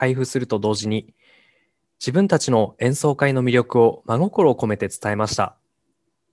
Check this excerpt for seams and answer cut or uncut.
uncut